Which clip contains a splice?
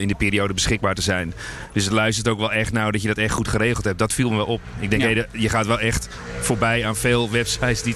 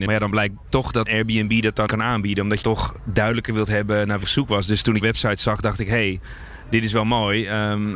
second; 5 cuts; at 1.1 s, 1.9 s, 2.6 s, 4.2 s, 5.0 s

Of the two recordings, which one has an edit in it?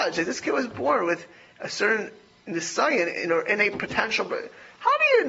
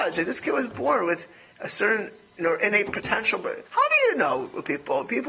second; 2 cuts; at 2.4 s, 3.7 s

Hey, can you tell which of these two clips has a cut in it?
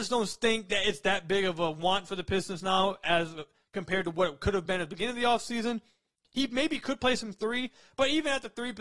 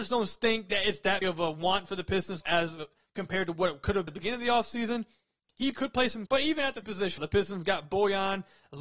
second; 7 cuts; at 1.2 s, 2.4 s, 4.1 s, 5.7 s, 6.3 s, 6.8 s, 7.2 s

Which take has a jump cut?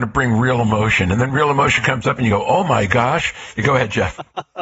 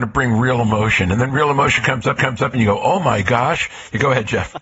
second; 1 cut; at 2.2 s

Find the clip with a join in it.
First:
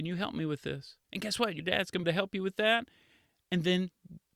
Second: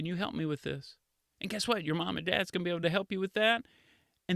first; 3 cuts; at 1.0 s, 1.6 s, 2.0 s

